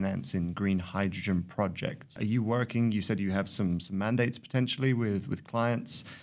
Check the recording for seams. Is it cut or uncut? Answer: uncut